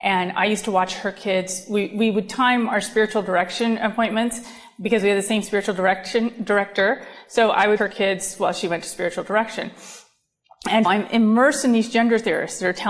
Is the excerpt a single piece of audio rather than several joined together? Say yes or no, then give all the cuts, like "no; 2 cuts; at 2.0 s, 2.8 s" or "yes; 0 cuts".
no; 2 cuts; at 7.8 s, 10.8 s